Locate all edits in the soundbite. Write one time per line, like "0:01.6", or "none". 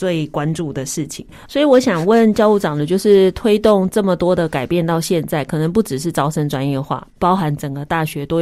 none

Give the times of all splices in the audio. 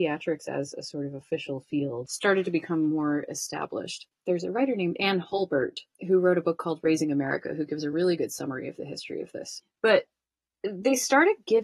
none

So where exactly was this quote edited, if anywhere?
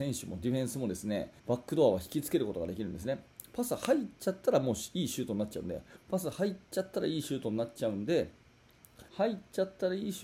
0:01.4
0:09.1

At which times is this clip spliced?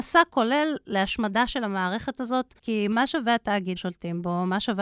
0:02.6
0:03.8

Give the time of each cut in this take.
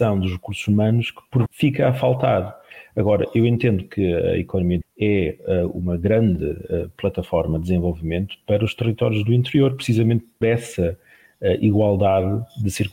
0:01.5
0:04.8
0:10.4

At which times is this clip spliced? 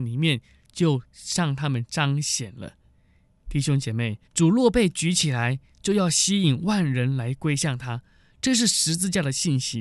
0:04.3

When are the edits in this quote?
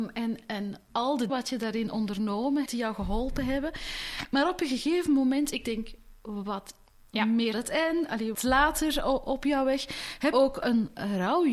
0:01.3
0:02.7
0:07.5
0:08.3
0:10.3

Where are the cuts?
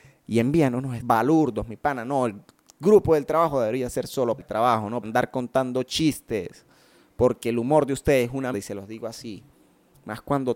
0:01.0
0:04.4
0:05.0
0:08.5

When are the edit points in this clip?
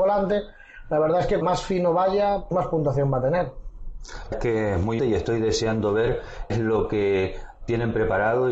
0:01.4
0:02.5
0:04.3
0:05.0
0:06.5

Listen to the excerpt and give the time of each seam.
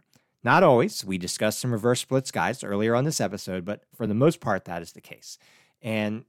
none

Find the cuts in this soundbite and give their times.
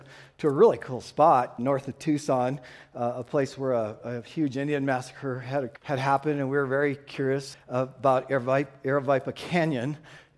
0:01.6
0:05.8
0:07.5

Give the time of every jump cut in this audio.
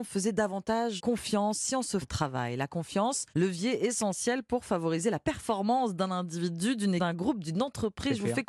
0:01.0
0:02.0
0:03.3
0:07.0

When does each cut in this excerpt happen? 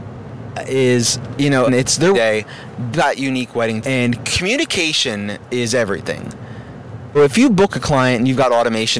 0:01.7
0:02.1
0:02.9
0:03.8
0:07.1

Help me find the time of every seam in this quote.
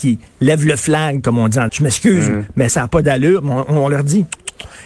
0:01.7
0:02.7

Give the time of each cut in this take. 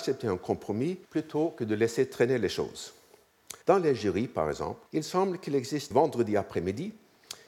0:01.0
0:03.6
0:04.9
0:05.9

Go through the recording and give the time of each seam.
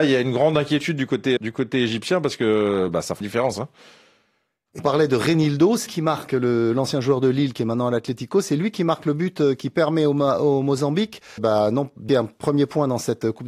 0:01.4
0:03.2
0:04.8
0:05.9
0:11.4
0:12.1

